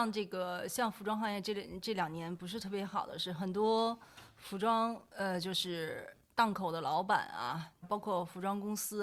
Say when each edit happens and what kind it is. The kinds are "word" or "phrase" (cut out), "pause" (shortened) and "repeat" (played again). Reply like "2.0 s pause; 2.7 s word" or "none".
7.8 s phrase